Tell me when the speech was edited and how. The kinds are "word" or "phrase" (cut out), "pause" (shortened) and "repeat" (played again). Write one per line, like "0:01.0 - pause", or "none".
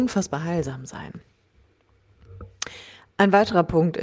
none